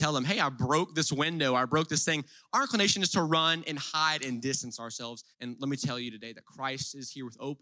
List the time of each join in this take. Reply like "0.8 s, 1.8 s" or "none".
5.3 s